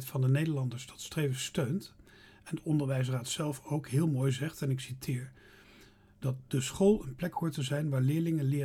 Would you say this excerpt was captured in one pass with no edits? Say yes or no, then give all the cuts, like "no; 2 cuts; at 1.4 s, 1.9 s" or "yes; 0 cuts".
yes; 0 cuts